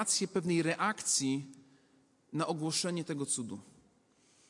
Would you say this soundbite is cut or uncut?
uncut